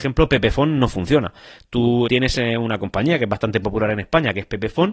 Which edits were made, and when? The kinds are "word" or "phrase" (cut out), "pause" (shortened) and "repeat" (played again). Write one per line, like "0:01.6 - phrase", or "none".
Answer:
0:02.1 - word